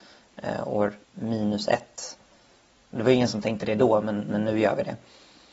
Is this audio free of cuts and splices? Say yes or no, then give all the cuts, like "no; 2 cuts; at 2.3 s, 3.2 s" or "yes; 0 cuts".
no; 1 cut; at 1.0 s